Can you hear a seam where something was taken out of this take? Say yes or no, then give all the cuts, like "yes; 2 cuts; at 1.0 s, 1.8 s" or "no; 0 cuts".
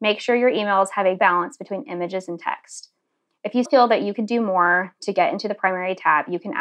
yes; 2 cuts; at 1.2 s, 3.7 s